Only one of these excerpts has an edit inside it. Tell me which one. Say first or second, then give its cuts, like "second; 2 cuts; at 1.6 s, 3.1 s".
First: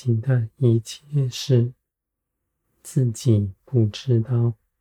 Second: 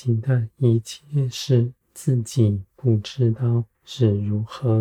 second; 2 cuts; at 1.8 s, 3.7 s